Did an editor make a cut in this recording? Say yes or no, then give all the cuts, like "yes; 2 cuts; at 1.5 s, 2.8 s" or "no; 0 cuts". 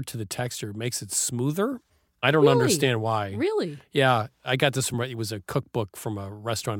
no; 0 cuts